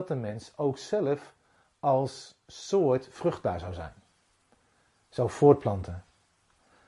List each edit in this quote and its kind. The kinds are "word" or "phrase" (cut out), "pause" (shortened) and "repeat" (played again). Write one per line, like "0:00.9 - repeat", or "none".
none

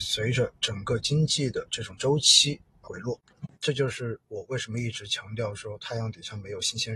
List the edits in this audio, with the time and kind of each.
0:02.8 - word
0:03.5 - pause

